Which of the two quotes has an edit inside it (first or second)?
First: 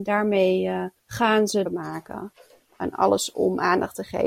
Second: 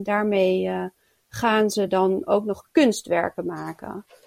first